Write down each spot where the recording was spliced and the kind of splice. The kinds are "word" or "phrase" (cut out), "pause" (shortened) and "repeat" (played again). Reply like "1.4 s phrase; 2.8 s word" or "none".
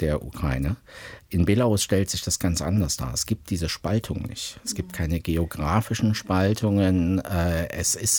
none